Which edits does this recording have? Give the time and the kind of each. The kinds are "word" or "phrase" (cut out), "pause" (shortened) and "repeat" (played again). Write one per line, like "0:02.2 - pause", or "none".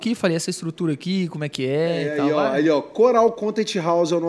none